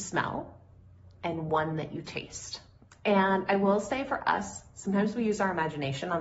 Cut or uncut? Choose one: uncut